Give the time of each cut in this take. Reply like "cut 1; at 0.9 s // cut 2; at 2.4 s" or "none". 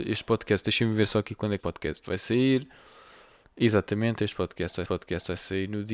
cut 1; at 1.6 s // cut 2; at 4.9 s